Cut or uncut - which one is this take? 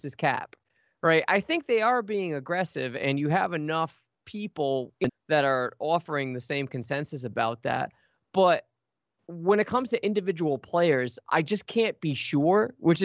cut